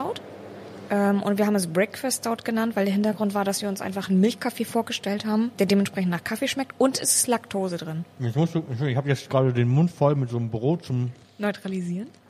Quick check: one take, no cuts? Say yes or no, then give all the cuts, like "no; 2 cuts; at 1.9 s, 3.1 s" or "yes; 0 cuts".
no; 2 cuts; at 8.1 s, 11.2 s